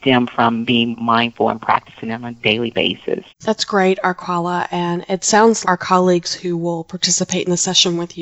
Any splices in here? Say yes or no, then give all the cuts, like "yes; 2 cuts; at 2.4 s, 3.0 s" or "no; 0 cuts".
yes; 3 cuts; at 0.9 s, 3.3 s, 5.6 s